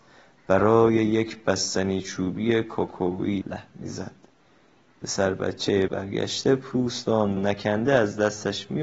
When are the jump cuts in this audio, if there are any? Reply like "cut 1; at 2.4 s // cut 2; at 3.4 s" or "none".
cut 1; at 3.4 s // cut 2; at 5.9 s // cut 3; at 7.4 s